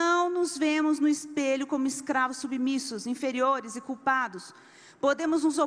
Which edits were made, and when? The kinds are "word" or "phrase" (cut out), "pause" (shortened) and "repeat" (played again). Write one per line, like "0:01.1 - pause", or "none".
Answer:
none